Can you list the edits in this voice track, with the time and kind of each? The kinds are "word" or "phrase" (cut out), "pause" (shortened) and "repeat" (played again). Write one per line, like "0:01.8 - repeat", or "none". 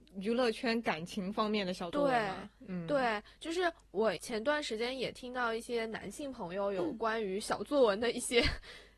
none